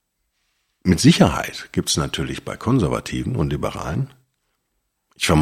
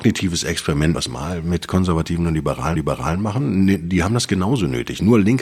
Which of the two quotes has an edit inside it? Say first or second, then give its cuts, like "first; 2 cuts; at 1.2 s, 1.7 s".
second; 2 cuts; at 0.9 s, 2.8 s